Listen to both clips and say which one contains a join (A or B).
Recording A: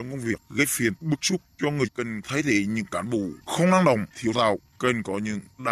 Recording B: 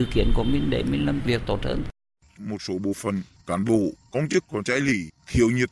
A